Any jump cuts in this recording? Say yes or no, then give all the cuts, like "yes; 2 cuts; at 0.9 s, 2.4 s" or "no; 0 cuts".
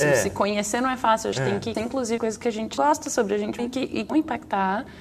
yes; 6 cuts; at 1.3 s, 1.7 s, 2.2 s, 2.8 s, 3.6 s, 4.1 s